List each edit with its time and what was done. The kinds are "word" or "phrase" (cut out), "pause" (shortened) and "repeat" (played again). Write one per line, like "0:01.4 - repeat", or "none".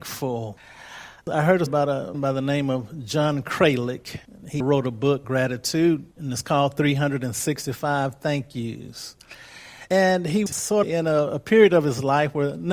0:01.7 - word
0:02.1 - word
0:04.6 - word
0:05.2 - word
0:10.5 - word
0:10.8 - word